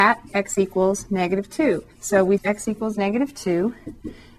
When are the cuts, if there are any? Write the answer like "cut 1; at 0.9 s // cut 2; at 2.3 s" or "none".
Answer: cut 1; at 1.9 s // cut 2; at 2.4 s